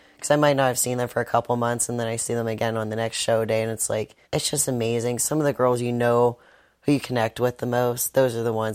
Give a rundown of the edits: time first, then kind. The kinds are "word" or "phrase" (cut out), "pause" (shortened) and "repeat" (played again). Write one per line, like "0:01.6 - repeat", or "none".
0:04.2 - pause